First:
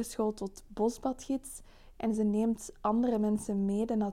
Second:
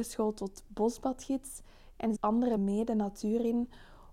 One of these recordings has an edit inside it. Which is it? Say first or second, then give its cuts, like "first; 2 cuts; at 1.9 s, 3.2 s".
second; 2 cuts; at 2.2 s, 2.6 s